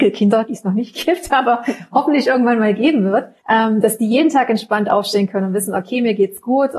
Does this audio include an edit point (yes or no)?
yes